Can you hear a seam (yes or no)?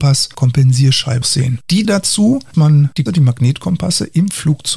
yes